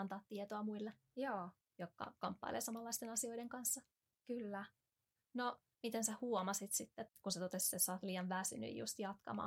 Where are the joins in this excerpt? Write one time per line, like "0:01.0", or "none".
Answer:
0:07.1